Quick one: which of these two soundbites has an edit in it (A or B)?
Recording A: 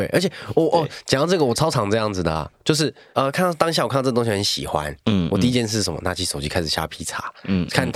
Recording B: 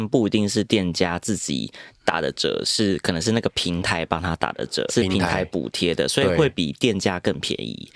B